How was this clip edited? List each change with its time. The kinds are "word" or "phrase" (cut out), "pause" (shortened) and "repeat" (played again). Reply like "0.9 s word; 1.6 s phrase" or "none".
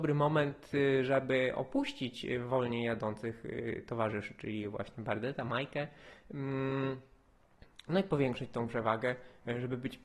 none